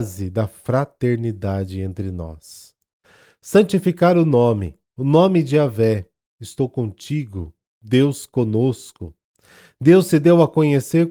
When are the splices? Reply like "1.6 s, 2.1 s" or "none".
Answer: 4.8 s